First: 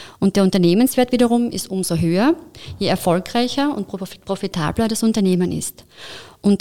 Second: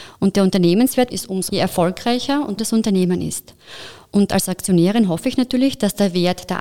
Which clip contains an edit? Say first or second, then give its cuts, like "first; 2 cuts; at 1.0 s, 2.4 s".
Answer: second; 3 cuts; at 1.1 s, 1.5 s, 2.6 s